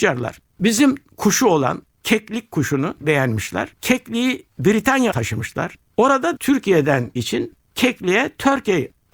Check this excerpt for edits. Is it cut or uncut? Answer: cut